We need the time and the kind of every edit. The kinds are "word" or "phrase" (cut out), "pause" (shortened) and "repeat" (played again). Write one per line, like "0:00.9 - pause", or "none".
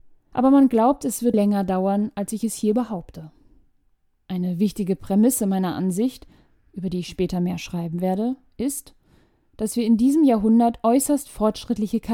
0:01.3 - word